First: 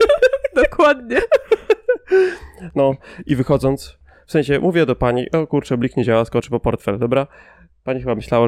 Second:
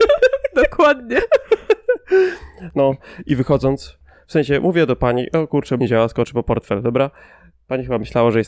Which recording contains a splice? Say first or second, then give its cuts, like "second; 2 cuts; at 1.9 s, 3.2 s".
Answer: second; 1 cut; at 5.8 s